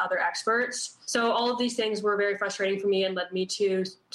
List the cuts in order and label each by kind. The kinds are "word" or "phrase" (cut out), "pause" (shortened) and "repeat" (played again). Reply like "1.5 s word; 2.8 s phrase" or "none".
1.0 s pause